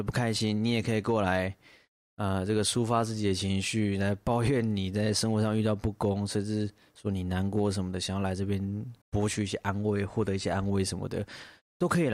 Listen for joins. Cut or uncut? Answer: cut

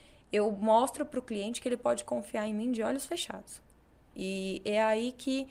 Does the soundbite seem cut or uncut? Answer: uncut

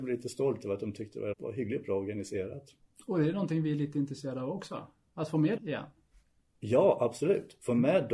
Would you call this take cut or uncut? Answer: cut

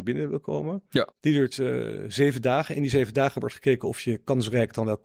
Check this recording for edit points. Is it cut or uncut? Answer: cut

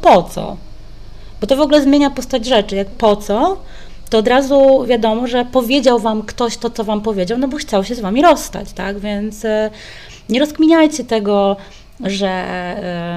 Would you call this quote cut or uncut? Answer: cut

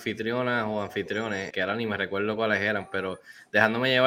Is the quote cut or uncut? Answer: cut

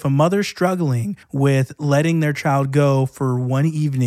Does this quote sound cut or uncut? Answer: cut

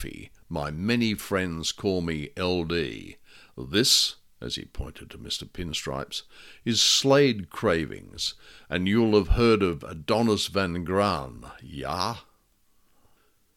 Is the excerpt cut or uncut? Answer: uncut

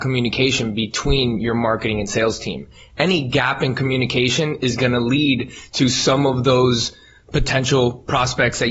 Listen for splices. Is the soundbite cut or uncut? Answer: uncut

